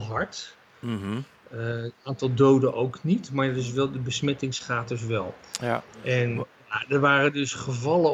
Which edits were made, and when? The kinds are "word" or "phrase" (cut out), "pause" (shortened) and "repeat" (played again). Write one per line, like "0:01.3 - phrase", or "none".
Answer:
none